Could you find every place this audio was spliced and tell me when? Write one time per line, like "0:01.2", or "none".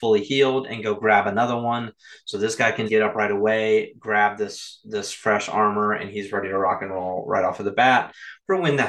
0:02.9